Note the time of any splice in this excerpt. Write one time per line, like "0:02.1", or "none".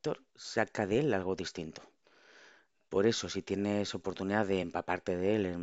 none